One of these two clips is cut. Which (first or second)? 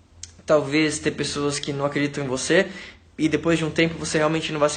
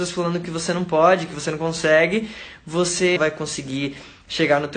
second